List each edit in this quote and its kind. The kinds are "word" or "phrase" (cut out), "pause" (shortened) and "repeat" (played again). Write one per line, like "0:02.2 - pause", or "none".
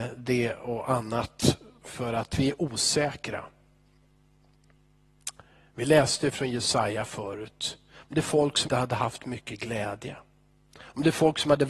0:08.7 - word